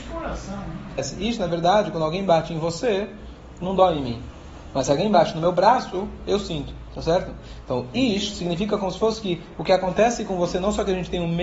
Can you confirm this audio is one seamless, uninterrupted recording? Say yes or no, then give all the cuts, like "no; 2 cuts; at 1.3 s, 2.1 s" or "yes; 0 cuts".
yes; 0 cuts